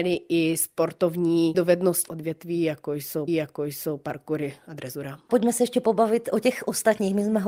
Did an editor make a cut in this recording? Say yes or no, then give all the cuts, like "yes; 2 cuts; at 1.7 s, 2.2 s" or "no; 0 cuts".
yes; 3 cuts; at 1.5 s, 2.1 s, 3.3 s